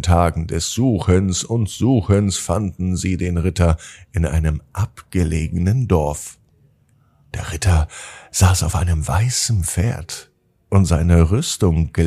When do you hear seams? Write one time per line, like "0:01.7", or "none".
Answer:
none

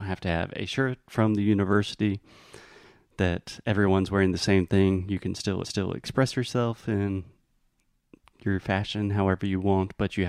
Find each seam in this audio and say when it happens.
0:05.6

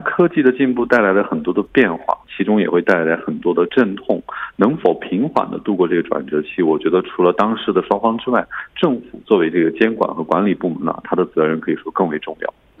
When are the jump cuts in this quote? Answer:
0:02.2

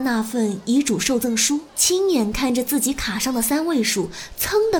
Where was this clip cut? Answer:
0:01.7

